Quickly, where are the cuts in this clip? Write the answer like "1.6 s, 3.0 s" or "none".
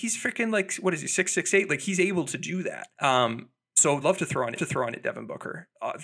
1.3 s, 2.9 s, 4.0 s, 4.6 s